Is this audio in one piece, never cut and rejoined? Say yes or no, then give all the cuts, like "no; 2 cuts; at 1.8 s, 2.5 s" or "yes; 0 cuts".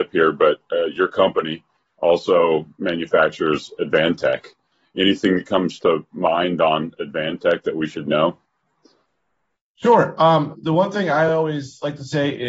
yes; 0 cuts